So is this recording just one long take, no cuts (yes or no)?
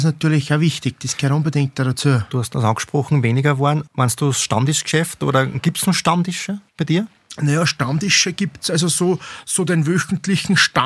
no